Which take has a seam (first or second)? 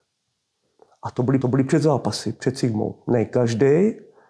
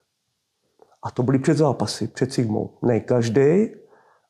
first